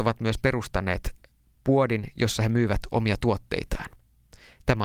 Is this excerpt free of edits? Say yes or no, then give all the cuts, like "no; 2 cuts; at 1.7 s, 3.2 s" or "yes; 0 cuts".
yes; 0 cuts